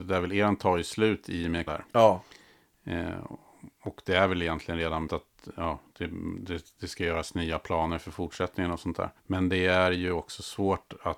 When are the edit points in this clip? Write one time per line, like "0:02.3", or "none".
0:01.7
0:05.1
0:09.2

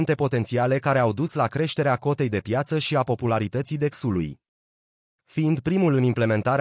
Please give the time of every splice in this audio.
none

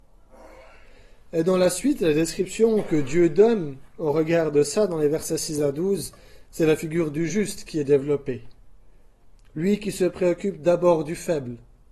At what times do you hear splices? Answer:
none

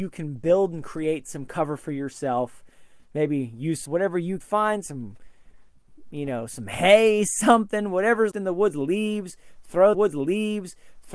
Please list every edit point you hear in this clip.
0:03.9
0:04.4
0:08.3
0:09.9

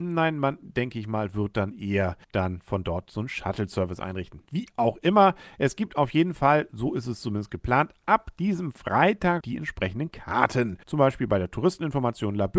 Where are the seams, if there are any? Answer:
0:02.2
0:09.4
0:10.8

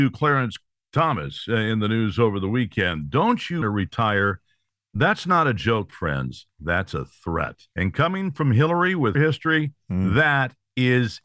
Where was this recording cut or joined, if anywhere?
0:03.6
0:07.7
0:09.1

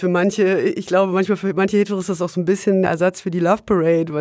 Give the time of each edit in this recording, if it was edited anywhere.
0:02.8

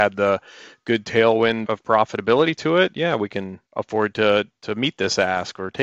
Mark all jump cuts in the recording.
0:01.6
0:03.7

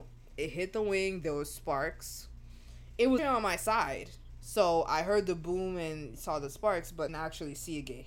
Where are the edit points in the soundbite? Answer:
0:03.2
0:07.1

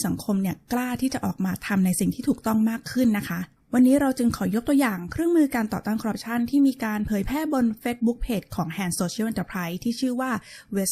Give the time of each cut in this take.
none

